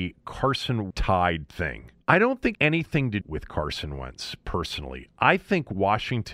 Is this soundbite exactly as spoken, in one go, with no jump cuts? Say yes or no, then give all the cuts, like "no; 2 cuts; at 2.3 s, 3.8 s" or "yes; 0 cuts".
no; 4 cuts; at 0.9 s, 2.0 s, 2.5 s, 3.2 s